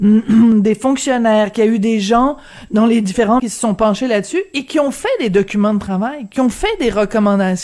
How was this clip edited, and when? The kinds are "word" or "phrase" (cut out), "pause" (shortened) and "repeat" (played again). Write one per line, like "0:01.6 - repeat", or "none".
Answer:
0:03.4 - word

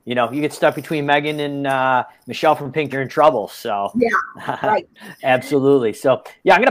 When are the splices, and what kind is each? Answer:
0:02.9 - word
0:04.9 - pause

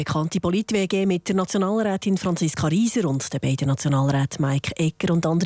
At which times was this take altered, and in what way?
none

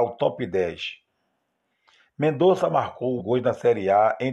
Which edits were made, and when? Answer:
0:03.2 - word

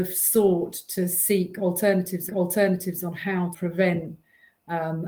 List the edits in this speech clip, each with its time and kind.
0:02.3 - repeat
0:03.5 - word

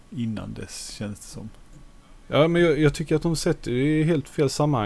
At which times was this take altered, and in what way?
none

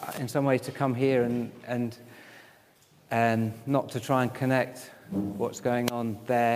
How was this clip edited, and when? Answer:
none

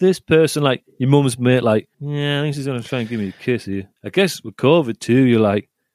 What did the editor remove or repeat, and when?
0:01.9 - pause
0:04.0 - pause

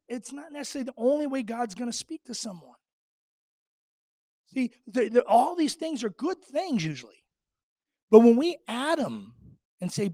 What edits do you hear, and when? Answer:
none

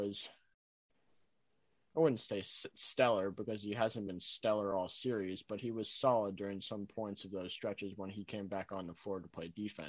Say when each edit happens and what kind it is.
none

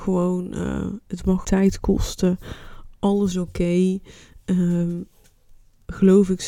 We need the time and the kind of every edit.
0:01.4 - word
0:03.3 - word

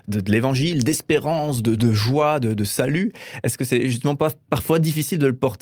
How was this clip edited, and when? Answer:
0:01.8 - word

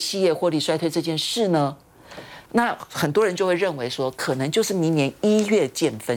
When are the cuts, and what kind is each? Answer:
0:02.4 - pause

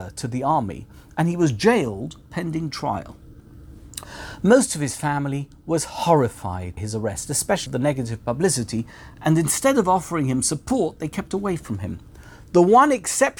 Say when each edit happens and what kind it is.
0:06.8 - word
0:07.7 - word

